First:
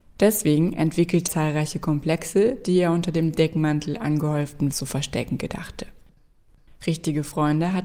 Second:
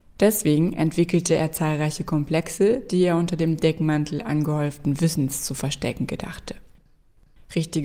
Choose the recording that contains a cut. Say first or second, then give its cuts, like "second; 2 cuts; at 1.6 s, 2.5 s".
first; 2 cuts; at 1.3 s, 4.7 s